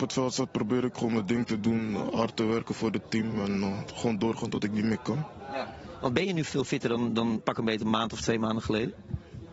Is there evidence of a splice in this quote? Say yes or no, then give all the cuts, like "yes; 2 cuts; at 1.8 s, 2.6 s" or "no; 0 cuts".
no; 0 cuts